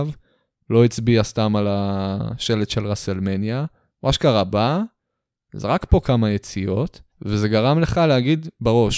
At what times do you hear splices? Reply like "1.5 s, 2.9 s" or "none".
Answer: 7.1 s